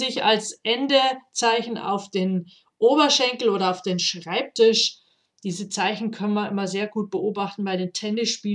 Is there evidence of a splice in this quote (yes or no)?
no